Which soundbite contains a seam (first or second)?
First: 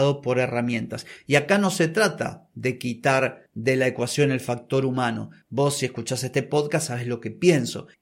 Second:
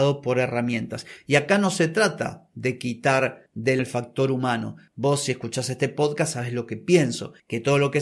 second